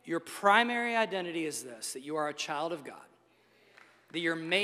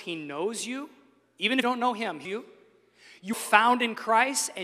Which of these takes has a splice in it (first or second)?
second